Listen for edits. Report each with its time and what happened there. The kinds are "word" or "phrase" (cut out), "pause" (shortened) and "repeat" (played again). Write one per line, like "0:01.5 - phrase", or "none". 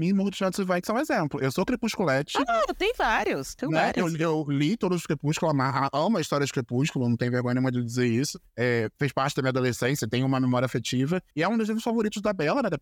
0:10.0 - word
0:11.3 - pause